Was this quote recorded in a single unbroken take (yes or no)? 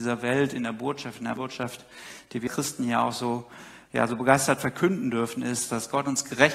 no